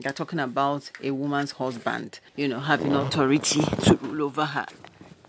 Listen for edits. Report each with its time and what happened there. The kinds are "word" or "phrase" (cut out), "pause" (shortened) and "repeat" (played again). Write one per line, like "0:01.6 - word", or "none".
0:02.3 - pause